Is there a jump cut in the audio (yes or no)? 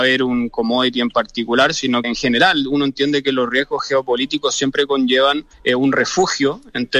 yes